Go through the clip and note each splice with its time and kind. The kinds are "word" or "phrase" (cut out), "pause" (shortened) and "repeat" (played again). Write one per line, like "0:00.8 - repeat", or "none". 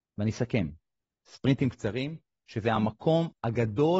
none

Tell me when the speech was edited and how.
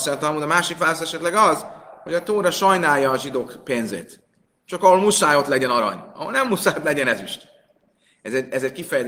none

